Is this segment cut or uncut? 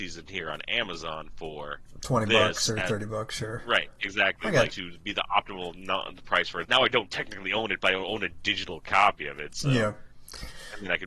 cut